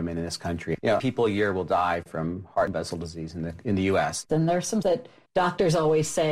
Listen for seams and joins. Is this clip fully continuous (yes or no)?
no